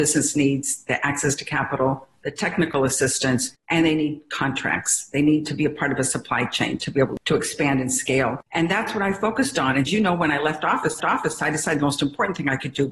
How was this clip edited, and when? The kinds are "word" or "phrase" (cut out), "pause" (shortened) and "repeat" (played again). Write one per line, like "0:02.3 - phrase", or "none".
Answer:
0:03.6 - pause
0:08.5 - pause
0:09.9 - phrase
0:11.0 - repeat